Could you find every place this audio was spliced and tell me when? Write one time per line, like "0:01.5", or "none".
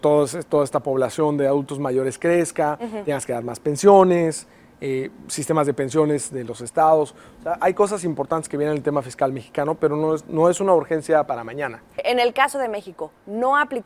none